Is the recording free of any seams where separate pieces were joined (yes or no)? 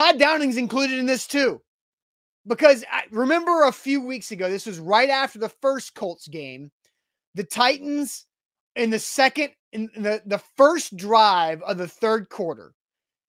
yes